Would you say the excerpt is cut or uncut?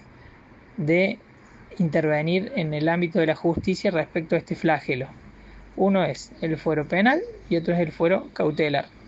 uncut